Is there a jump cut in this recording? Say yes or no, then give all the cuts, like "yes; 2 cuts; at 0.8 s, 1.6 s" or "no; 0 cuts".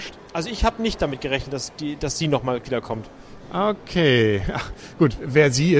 no; 0 cuts